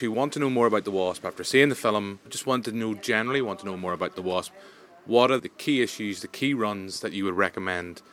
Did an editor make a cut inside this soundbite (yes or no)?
yes